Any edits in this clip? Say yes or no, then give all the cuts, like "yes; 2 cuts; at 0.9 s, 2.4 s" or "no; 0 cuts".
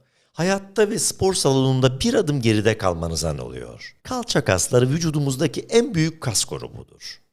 yes; 2 cuts; at 3.4 s, 4.0 s